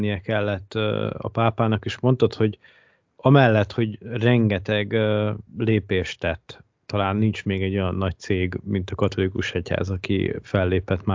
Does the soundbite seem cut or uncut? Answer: cut